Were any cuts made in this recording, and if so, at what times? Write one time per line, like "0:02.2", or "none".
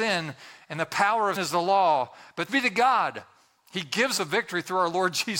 0:01.4
0:02.5
0:04.2